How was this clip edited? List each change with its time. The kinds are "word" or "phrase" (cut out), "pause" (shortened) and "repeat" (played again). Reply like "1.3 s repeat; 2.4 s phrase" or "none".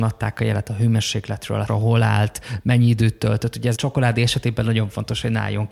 1.7 s word; 3.7 s word